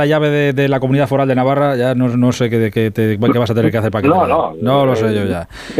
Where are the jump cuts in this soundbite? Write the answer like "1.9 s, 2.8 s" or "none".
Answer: none